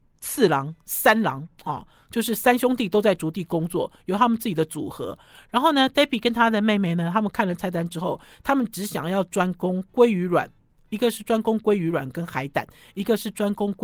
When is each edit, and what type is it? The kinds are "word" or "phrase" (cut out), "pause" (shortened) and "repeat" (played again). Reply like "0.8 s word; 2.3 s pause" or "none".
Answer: none

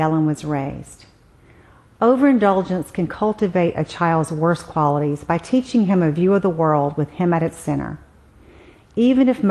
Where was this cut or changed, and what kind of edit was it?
none

